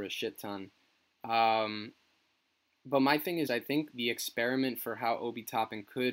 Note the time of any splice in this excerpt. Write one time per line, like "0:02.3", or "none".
0:03.5
0:03.9

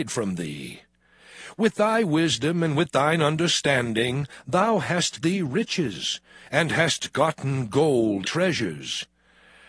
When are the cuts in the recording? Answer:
0:05.2
0:08.2

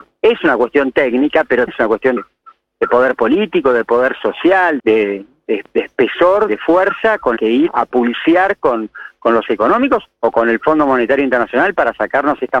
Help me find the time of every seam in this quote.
0:01.7
0:02.2
0:04.8
0:06.5
0:07.4
0:07.7
0:09.5

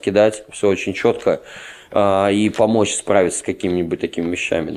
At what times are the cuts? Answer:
none

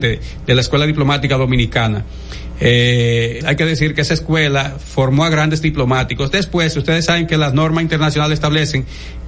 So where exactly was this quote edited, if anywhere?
0:03.4

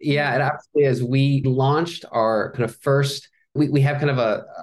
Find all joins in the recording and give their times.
0:01.4
0:02.5
0:03.6

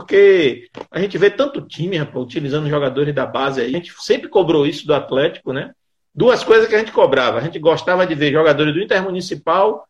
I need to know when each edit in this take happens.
0:03.7

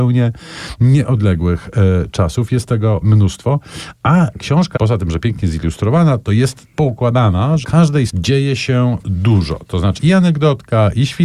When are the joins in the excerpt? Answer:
0:03.0
0:04.8
0:06.7
0:07.6
0:08.1
0:09.0
0:10.0

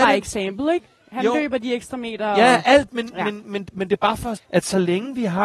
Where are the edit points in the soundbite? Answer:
0:02.9
0:03.4
0:04.4

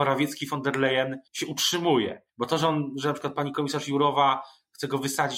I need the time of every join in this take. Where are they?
0:01.3
0:02.3

